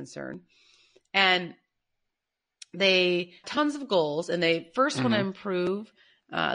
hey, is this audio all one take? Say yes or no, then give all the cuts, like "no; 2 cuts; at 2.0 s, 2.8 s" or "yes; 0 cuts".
no; 1 cut; at 3.4 s